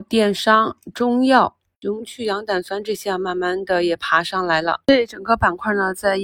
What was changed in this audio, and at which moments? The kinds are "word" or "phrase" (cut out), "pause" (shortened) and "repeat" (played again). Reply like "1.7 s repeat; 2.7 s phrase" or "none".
4.8 s pause